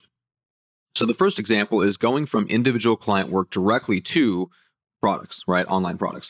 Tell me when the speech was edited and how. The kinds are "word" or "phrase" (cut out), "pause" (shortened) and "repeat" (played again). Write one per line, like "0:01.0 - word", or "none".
none